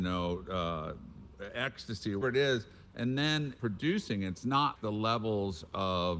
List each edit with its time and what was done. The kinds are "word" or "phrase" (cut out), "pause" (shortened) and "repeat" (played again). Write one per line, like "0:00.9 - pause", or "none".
0:02.2 - word
0:03.6 - phrase
0:04.8 - word